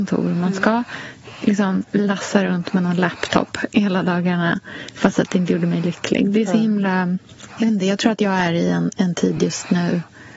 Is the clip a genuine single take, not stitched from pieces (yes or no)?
yes